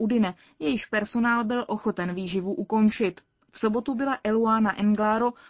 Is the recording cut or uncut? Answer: uncut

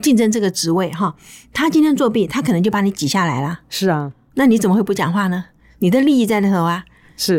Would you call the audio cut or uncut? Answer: uncut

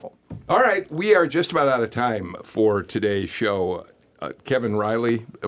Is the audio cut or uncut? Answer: uncut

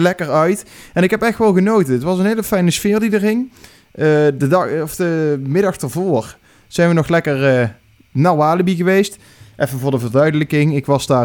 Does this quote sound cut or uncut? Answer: uncut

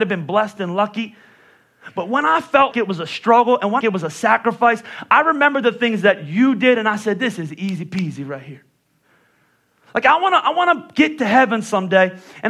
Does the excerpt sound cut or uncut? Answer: cut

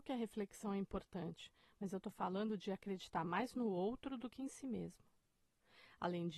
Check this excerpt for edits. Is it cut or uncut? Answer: uncut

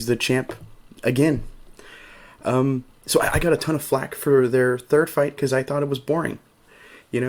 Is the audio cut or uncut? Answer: cut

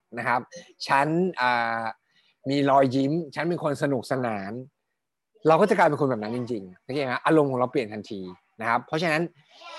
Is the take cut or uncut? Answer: uncut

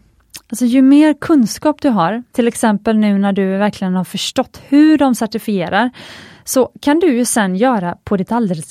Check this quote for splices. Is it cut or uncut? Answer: cut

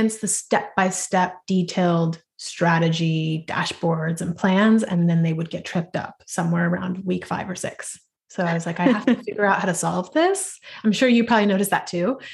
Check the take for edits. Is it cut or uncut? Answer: uncut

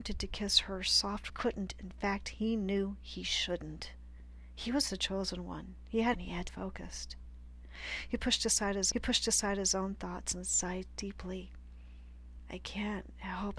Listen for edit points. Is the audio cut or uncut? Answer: cut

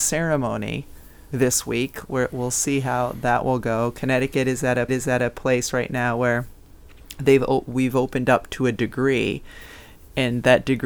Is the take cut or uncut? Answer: cut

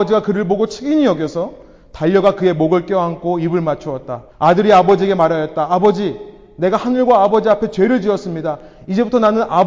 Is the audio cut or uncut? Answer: cut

